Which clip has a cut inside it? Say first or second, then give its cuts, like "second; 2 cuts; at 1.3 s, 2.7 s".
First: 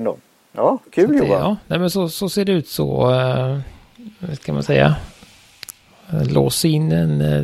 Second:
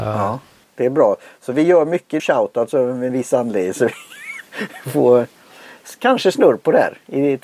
second; 2 cuts; at 2.2 s, 3.1 s